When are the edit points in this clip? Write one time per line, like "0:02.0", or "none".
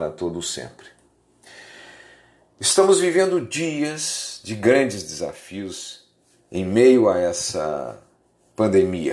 none

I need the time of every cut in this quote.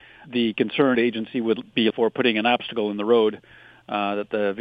0:00.9
0:01.9

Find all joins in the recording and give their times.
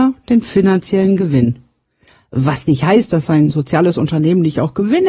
none

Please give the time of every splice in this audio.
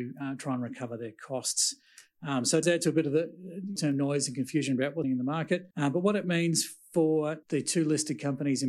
0:02.6
0:03.8
0:05.0
0:05.7
0:07.4

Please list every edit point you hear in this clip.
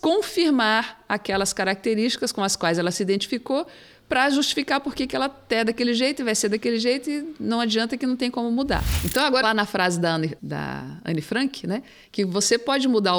0:09.4
0:10.4

